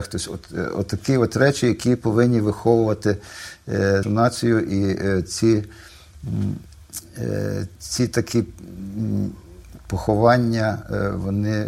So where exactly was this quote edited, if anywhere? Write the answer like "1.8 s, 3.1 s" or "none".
4.0 s